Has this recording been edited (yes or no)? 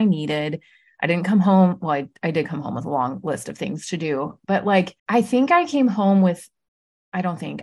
yes